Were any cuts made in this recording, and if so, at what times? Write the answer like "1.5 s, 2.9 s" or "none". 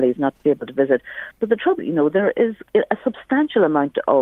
1.8 s, 2.7 s